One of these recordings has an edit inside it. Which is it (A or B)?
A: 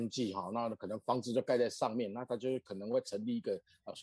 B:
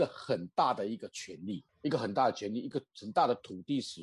B